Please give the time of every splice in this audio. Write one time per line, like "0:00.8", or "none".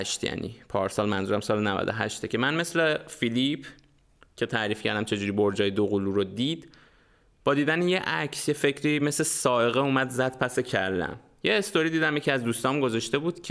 none